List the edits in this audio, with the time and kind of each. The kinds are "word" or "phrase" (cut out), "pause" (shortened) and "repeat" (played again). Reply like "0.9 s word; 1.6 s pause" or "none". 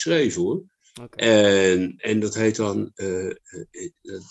2.0 s word